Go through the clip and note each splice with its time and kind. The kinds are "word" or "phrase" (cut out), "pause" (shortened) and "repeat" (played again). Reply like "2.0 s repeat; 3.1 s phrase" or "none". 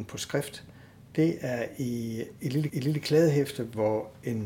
2.7 s repeat